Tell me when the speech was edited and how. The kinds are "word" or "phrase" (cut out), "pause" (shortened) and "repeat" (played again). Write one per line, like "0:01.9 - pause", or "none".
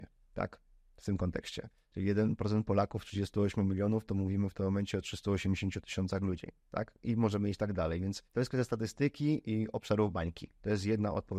0:06.6 - pause
0:08.3 - pause